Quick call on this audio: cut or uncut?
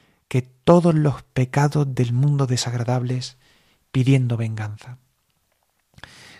uncut